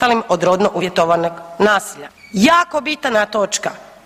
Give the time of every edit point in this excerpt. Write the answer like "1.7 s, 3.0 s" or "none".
none